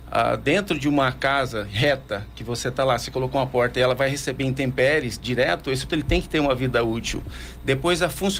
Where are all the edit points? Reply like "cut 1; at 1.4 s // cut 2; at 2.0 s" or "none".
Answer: cut 1; at 5.9 s